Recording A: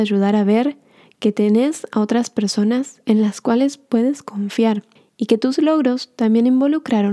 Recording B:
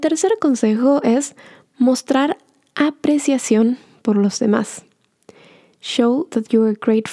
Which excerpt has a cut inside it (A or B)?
A